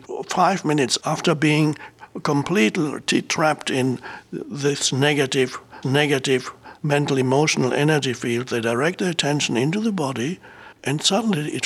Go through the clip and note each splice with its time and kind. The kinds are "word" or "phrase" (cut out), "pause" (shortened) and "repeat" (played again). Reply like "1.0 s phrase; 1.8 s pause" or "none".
5.8 s repeat; 10.7 s pause